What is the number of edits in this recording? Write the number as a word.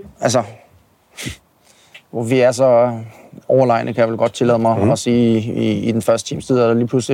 one